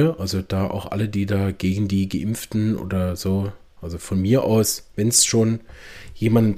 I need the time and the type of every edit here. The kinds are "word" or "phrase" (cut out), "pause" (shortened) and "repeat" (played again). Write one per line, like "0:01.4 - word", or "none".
none